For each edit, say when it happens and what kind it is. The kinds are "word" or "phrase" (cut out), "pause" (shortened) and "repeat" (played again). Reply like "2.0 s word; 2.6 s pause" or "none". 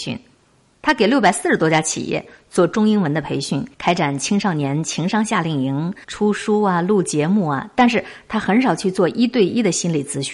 3.7 s pause; 6.0 s pause